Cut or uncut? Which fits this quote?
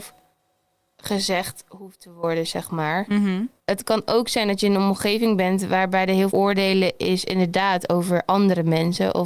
cut